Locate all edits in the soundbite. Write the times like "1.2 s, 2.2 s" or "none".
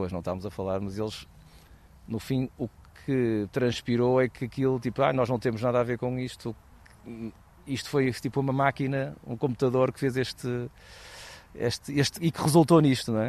none